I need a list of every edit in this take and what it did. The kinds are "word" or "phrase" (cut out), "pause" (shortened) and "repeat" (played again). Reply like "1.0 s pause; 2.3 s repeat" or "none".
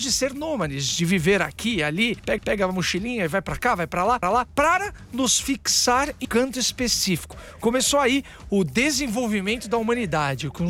2.4 s repeat; 4.2 s repeat; 6.2 s word